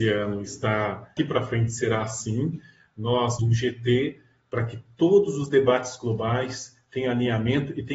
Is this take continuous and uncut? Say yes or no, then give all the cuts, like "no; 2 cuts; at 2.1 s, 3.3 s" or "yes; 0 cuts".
no; 2 cuts; at 1.2 s, 3.4 s